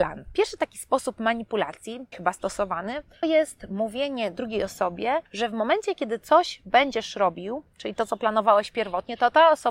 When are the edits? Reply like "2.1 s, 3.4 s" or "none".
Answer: 2.1 s, 3.2 s, 5.3 s